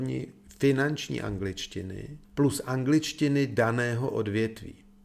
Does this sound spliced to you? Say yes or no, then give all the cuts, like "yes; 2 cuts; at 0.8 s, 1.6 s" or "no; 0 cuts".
yes; 1 cut; at 2.2 s